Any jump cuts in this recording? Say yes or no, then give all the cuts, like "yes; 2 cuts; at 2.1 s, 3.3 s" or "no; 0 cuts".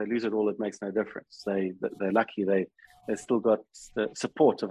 no; 0 cuts